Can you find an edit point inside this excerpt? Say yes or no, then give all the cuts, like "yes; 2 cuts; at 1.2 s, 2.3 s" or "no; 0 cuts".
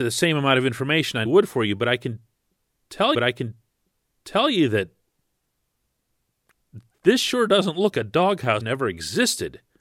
yes; 4 cuts; at 1.3 s, 3.1 s, 7.9 s, 8.6 s